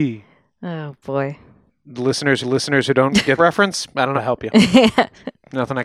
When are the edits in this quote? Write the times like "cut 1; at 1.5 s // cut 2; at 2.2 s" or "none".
cut 1; at 1.7 s // cut 2; at 2.4 s // cut 3; at 3.4 s // cut 4; at 4.2 s